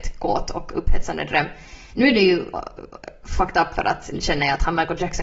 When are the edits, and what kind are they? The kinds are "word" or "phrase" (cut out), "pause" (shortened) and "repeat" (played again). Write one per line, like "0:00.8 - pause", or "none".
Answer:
none